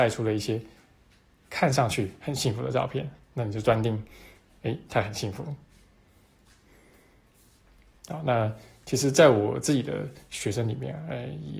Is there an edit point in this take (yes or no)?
yes